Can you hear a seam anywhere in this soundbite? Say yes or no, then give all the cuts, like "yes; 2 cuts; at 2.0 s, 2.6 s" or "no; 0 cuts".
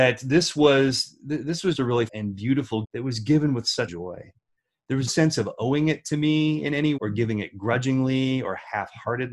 yes; 6 cuts; at 1.7 s, 2.1 s, 2.8 s, 3.9 s, 5.1 s, 7.0 s